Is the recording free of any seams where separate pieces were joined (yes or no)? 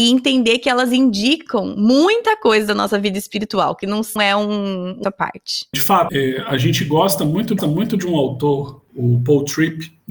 no